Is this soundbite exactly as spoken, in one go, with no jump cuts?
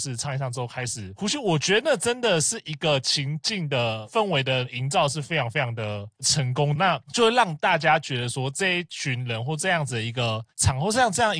no; 1 cut; at 6.8 s

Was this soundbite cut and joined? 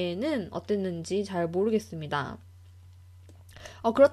no; 0 cuts

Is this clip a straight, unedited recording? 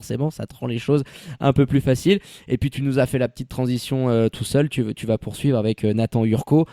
yes; 0 cuts

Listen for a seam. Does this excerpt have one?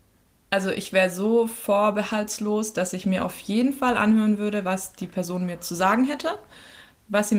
no; 0 cuts

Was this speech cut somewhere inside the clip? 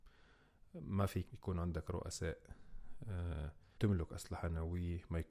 yes; 2 cuts; at 1.3 s, 3.8 s

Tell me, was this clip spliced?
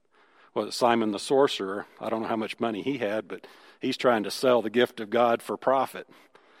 no; 0 cuts

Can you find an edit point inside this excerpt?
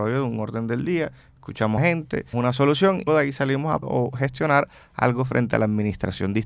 yes; 4 cuts; at 1.8 s, 2.3 s, 3.1 s, 3.8 s

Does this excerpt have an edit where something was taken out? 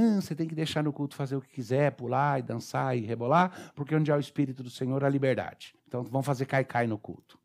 yes; 1 cut; at 5.8 s

